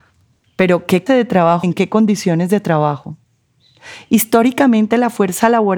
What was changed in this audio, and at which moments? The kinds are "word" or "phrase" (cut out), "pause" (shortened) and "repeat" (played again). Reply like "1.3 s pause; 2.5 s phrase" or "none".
1.1 s word; 1.6 s word